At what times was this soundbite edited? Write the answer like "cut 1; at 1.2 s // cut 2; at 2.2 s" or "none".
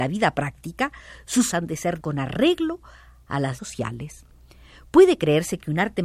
cut 1; at 1.5 s // cut 2; at 2.0 s // cut 3; at 3.6 s

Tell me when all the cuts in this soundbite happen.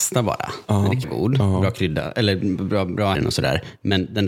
cut 1; at 1.0 s // cut 2; at 3.1 s

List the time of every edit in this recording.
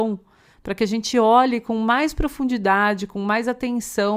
none

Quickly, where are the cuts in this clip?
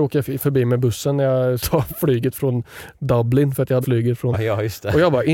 cut 1; at 1.6 s // cut 2; at 3.8 s // cut 3; at 4.3 s

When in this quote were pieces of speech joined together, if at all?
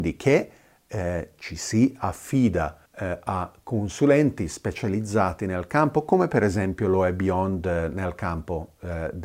cut 1; at 2.9 s

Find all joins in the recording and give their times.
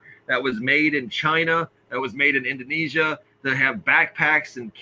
none

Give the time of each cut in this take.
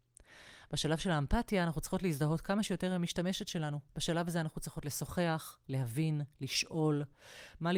cut 1; at 3.9 s

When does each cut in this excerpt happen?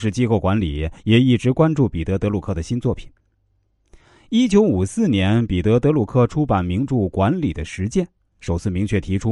none

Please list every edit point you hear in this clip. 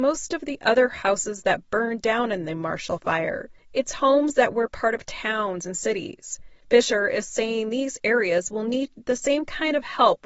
none

